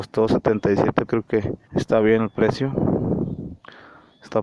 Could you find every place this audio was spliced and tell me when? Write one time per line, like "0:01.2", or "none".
0:01.1
0:01.6